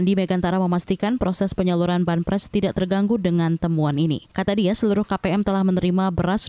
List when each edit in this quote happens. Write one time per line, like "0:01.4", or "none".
0:04.3